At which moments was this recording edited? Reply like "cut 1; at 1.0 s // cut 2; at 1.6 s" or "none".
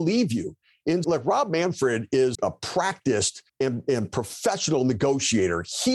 cut 1; at 1.0 s // cut 2; at 2.3 s // cut 3; at 3.5 s